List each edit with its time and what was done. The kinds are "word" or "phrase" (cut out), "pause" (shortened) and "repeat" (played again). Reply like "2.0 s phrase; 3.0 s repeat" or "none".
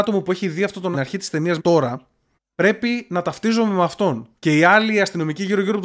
0.9 s phrase; 1.6 s word; 2.3 s pause; 4.4 s pause